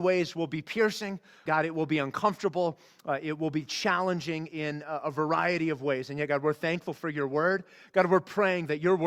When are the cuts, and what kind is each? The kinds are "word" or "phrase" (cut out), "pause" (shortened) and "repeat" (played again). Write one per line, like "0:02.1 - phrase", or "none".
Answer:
0:01.5 - word